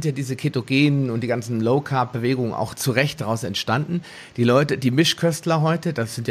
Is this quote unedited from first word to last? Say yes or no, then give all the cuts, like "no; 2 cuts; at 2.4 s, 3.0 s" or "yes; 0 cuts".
yes; 0 cuts